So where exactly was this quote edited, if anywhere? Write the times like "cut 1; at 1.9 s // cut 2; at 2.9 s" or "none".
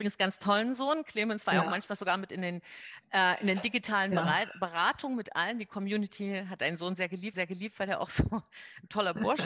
cut 1; at 7.3 s

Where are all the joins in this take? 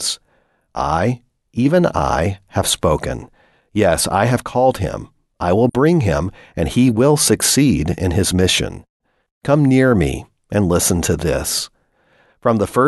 none

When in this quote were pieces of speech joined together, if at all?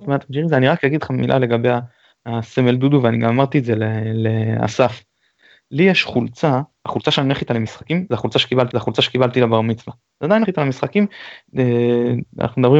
cut 1; at 8.7 s // cut 2; at 10.4 s

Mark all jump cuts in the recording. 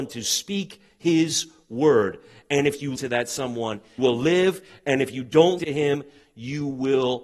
cut 1; at 3.0 s // cut 2; at 4.0 s // cut 3; at 5.6 s

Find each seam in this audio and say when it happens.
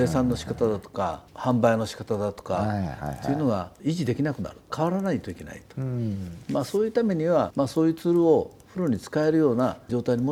cut 1; at 1.3 s

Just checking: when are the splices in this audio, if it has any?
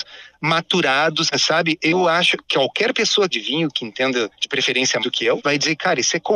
cut 1; at 1.3 s // cut 2; at 3.3 s // cut 3; at 5.0 s // cut 4; at 5.4 s

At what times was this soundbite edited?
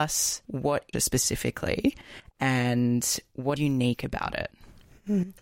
cut 1; at 0.9 s // cut 2; at 3.6 s

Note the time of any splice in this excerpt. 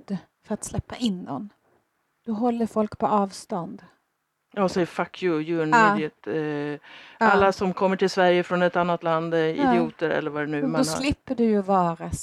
none

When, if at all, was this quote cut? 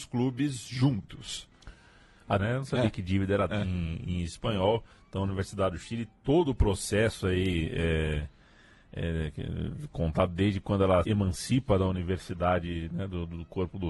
cut 1; at 2.4 s // cut 2; at 3.5 s // cut 3; at 11.0 s

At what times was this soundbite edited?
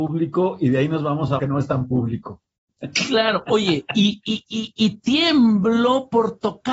cut 1; at 1.4 s // cut 2; at 4.2 s

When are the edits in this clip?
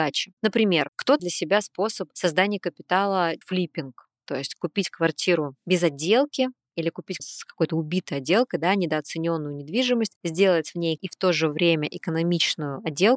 cut 1; at 1.2 s // cut 2; at 3.4 s // cut 3; at 7.2 s // cut 4; at 11.0 s

